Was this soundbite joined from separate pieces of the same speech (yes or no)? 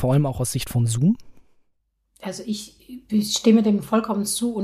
no